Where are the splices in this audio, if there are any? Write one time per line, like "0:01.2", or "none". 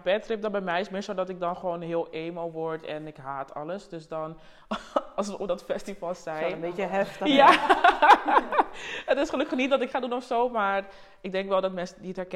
0:09.9